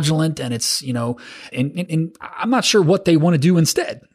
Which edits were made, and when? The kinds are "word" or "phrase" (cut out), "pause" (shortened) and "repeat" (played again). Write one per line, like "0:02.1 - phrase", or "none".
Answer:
0:01.5 - word
0:01.9 - word

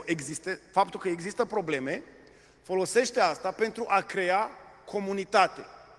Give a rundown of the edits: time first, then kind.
none

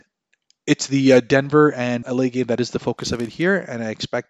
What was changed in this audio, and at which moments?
0:02.0 - word

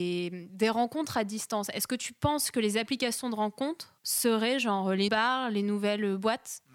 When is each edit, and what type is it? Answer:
0:04.0 - pause
0:05.1 - word

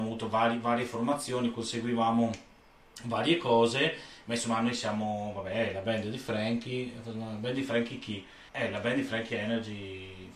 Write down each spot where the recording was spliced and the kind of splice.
0:08.5 - pause

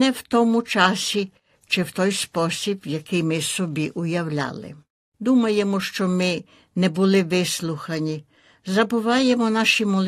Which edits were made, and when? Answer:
none

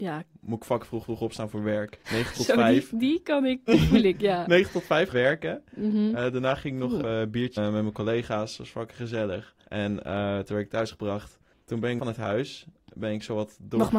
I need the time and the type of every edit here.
0:01.0 - repeat
0:02.0 - pause
0:03.7 - word
0:05.1 - word
0:07.0 - word
0:07.6 - phrase
0:09.6 - pause
0:11.5 - pause
0:12.0 - word

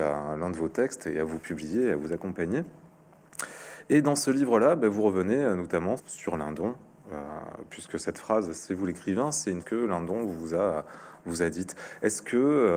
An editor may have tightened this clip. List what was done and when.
0:06.0 - word
0:09.6 - word

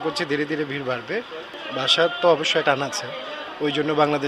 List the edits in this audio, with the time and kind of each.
0:02.6 - word

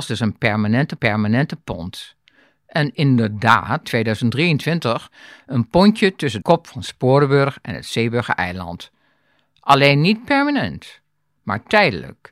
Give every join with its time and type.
0:01.0 - repeat
0:03.8 - phrase
0:06.4 - word

